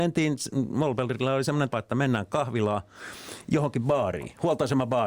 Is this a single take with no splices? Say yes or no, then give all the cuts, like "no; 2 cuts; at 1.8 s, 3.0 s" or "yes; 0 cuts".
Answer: no; 1 cut; at 1.7 s